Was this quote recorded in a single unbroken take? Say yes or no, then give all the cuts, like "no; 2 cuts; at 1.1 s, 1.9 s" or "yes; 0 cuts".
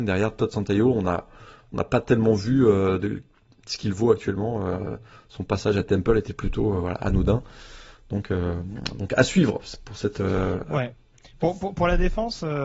yes; 0 cuts